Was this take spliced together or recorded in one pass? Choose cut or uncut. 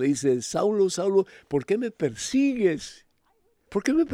uncut